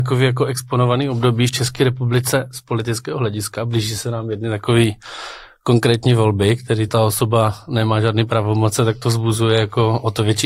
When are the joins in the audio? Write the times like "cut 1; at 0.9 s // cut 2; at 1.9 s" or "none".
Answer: cut 1; at 6.9 s